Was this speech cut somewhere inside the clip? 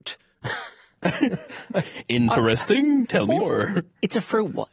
yes; 2 cuts; at 3.1 s, 3.4 s

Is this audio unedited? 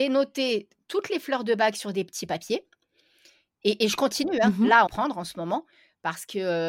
no; 1 cut; at 4.9 s

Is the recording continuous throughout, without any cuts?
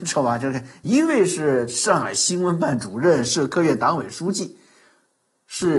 yes; 0 cuts

